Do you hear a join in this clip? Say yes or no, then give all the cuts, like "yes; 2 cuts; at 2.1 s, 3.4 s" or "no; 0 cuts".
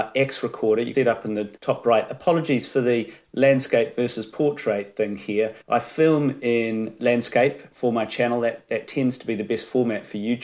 yes; 4 cuts; at 0.9 s, 1.6 s, 5.6 s, 7.7 s